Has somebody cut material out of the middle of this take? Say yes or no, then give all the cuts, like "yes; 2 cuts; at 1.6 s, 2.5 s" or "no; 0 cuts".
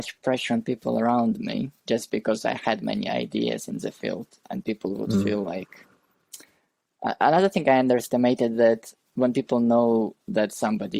yes; 1 cut; at 1.8 s